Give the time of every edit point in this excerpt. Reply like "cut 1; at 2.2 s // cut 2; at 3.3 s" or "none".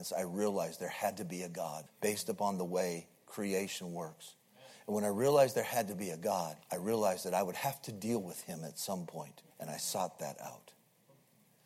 cut 1; at 1.9 s // cut 2; at 6.6 s // cut 3; at 9.5 s